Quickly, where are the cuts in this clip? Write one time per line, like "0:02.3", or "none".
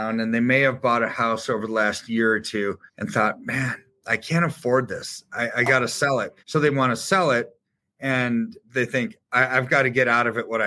0:02.9
0:06.4
0:08.6